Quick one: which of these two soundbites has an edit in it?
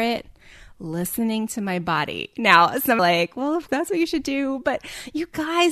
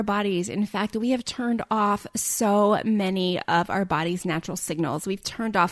first; 2 cuts; at 3.0 s, 3.7 s

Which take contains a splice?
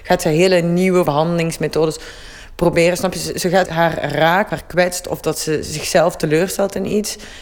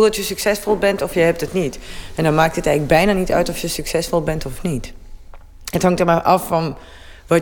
first; 3 cuts; at 1.0 s, 3.6 s, 4.5 s

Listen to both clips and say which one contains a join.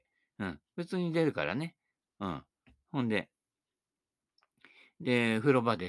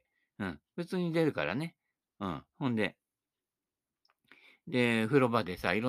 second; 1 cut; at 2.5 s

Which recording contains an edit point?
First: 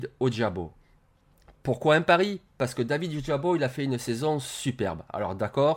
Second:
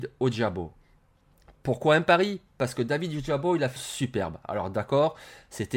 second; 1 cut; at 3.8 s

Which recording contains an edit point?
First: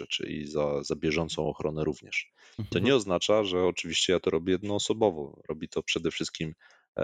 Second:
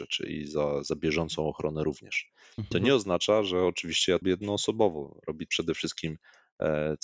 second; 2 cuts; at 4.2 s, 5.5 s

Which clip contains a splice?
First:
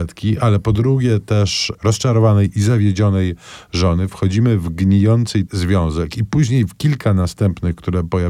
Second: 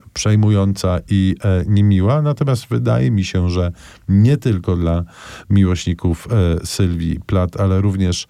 first; 1 cut; at 5.5 s

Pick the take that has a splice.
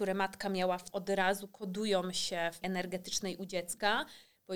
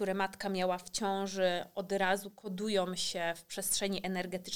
first; 2 cuts; at 0.9 s, 2.6 s

